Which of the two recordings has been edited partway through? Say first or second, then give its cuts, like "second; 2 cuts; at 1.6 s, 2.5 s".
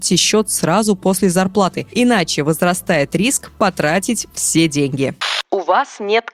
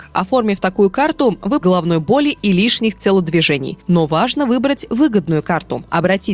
second; 1 cut; at 1.6 s